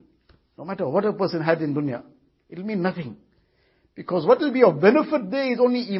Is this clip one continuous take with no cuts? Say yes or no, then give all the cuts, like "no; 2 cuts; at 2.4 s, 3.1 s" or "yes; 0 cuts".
yes; 0 cuts